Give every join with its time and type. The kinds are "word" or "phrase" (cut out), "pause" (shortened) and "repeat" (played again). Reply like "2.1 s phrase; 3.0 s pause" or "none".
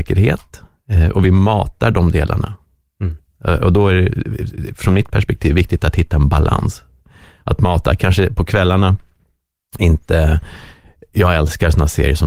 none